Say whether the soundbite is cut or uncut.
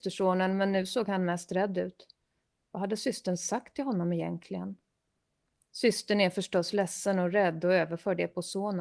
uncut